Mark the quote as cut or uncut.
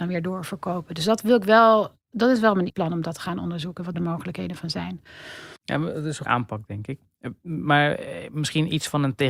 cut